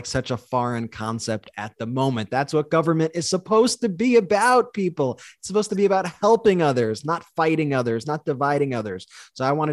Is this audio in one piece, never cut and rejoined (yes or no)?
yes